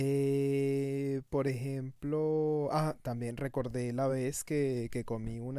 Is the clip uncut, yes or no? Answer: yes